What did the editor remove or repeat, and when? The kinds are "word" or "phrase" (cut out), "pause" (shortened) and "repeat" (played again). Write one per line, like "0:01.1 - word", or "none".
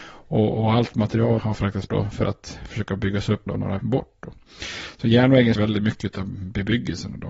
0:01.4 - word
0:01.9 - word
0:03.5 - word
0:03.8 - word
0:05.6 - word